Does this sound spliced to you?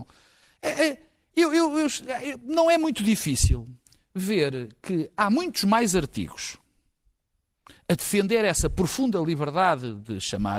no; 0 cuts

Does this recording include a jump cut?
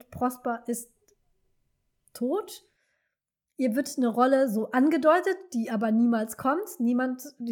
no; 0 cuts

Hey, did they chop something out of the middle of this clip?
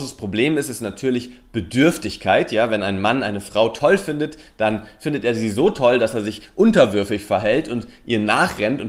no; 0 cuts

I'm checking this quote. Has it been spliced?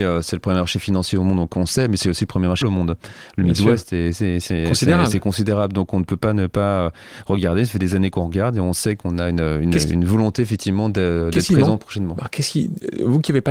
yes; 1 cut; at 2.6 s

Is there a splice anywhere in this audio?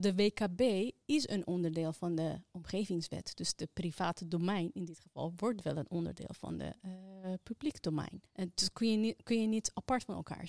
yes; 1 cut; at 8.3 s

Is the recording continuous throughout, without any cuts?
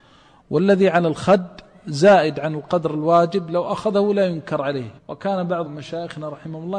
no; 2 cuts; at 5.0 s, 5.7 s

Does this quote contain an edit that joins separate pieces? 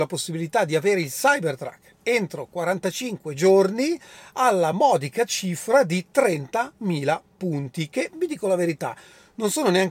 no; 0 cuts

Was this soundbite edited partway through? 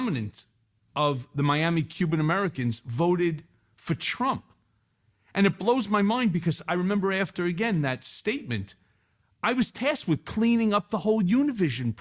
no; 0 cuts

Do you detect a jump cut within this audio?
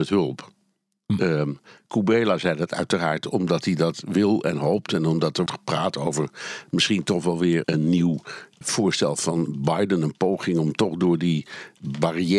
yes; 3 cuts; at 5.5 s, 7.6 s, 8.6 s

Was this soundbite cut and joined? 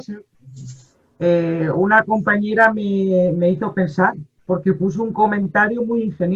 no; 0 cuts

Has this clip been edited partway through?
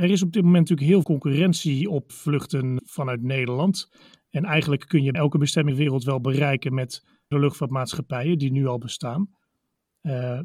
yes; 6 cuts; at 1.0 s, 2.1 s, 2.8 s, 5.1 s, 5.7 s, 7.3 s

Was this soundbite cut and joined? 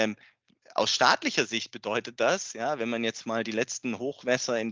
no; 0 cuts

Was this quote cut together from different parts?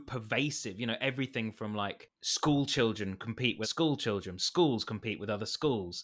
yes; 2 cuts; at 2.2 s, 3.6 s

